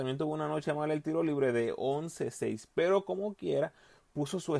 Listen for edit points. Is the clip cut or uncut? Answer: uncut